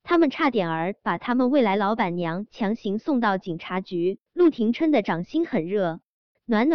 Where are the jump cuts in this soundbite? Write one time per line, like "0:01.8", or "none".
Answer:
0:04.3